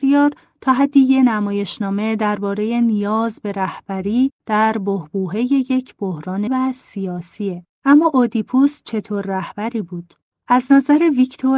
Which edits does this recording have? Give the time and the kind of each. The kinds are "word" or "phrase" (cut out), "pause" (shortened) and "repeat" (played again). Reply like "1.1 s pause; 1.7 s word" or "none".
6.5 s word